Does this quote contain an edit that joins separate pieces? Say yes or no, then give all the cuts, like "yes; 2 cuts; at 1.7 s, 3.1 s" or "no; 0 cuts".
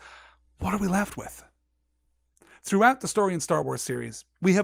no; 0 cuts